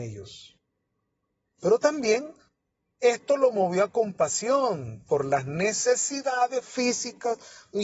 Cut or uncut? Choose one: uncut